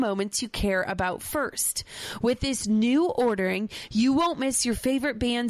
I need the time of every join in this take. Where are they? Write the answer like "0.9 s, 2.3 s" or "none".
none